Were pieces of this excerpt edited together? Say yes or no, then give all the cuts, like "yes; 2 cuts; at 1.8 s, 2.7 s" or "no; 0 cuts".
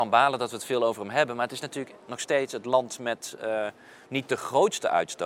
no; 0 cuts